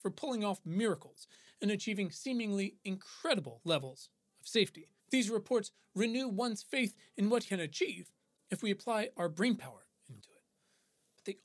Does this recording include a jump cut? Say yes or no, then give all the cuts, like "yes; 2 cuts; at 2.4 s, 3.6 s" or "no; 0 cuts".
yes; 3 cuts; at 5.0 s, 7.4 s, 10.2 s